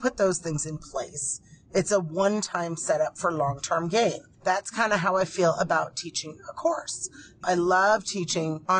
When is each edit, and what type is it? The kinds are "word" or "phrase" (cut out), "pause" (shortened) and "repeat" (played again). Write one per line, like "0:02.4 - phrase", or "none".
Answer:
none